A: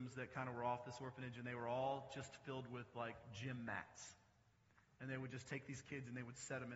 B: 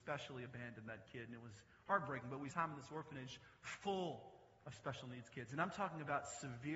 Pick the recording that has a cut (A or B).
B